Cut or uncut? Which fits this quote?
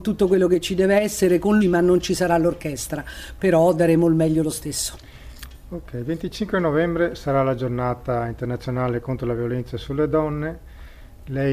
cut